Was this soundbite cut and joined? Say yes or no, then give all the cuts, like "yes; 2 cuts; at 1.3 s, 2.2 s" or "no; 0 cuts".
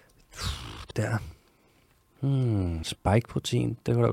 yes; 2 cuts; at 0.9 s, 2.8 s